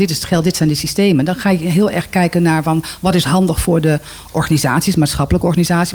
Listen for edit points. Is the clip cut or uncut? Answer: uncut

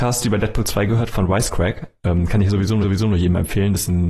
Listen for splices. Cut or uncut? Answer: cut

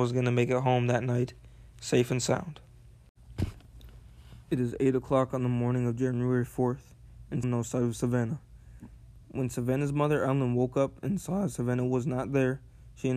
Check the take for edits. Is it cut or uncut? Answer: cut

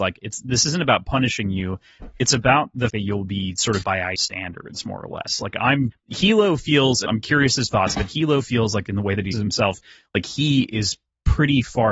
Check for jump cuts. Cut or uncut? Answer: cut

